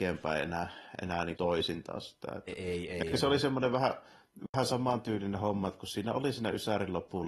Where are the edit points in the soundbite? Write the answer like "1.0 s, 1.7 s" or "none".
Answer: 1.4 s